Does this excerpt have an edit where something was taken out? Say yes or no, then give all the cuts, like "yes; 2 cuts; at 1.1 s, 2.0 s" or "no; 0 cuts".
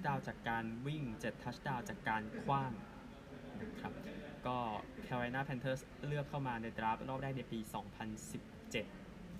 no; 0 cuts